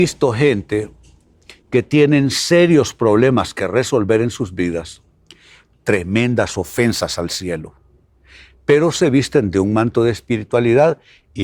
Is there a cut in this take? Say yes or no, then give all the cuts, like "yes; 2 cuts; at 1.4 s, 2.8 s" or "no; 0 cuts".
no; 0 cuts